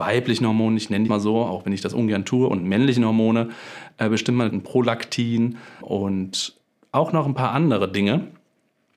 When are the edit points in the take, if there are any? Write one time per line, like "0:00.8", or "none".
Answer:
0:01.1
0:04.5
0:05.8

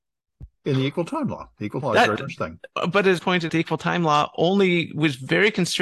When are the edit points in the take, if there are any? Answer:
0:01.8
0:02.4
0:03.2
0:03.5

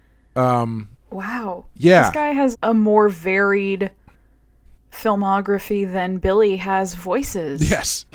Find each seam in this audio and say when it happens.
0:00.9
0:02.5

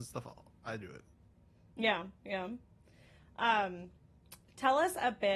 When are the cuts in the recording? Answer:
none

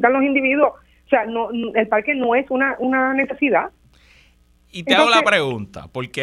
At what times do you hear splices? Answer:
none

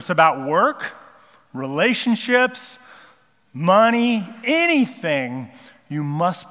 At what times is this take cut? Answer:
none

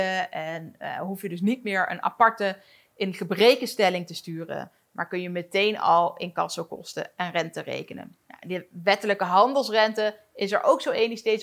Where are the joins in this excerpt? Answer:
none

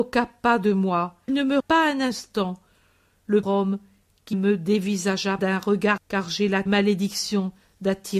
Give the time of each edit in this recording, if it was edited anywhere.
0:01.3
0:01.6
0:03.4
0:04.3
0:05.4
0:06.0
0:06.7

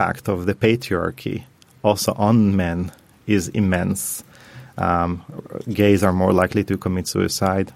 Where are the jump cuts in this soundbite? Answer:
none

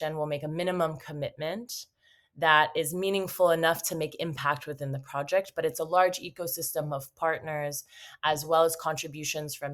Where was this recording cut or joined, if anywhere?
none

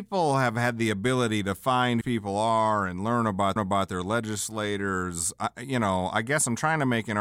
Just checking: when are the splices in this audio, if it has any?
0:02.0
0:03.6

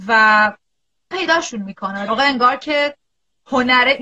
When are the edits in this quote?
0:01.1
0:02.1

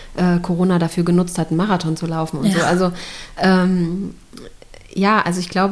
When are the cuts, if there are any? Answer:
none

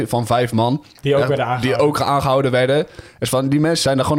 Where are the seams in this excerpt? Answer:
none

